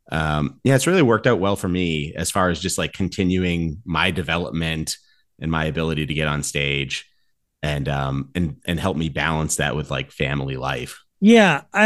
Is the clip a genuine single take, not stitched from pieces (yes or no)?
yes